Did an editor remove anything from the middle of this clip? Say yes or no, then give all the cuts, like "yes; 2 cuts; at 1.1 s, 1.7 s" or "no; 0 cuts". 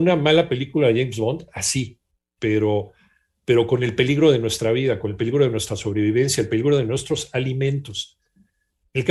no; 0 cuts